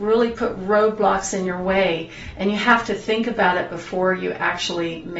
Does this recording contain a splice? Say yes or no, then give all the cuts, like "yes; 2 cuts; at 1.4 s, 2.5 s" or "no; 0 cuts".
no; 0 cuts